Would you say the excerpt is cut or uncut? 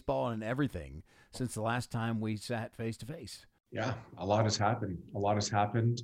uncut